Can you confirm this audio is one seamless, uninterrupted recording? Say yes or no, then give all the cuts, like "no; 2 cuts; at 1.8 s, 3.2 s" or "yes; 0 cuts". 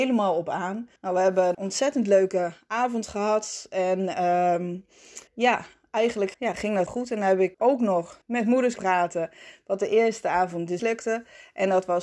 no; 9 cuts; at 1.0 s, 1.5 s, 5.3 s, 6.3 s, 6.9 s, 7.5 s, 8.2 s, 8.8 s, 10.8 s